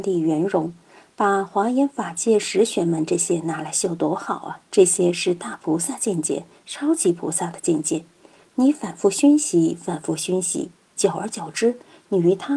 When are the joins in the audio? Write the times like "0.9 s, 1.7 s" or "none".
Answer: 4.7 s